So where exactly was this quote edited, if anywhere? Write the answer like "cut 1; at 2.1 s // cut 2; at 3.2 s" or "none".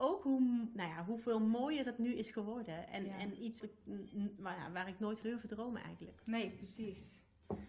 cut 1; at 3.6 s // cut 2; at 5.2 s